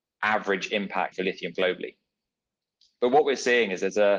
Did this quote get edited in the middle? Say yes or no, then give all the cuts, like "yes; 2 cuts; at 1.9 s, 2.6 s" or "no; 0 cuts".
yes; 2 cuts; at 1.1 s, 1.5 s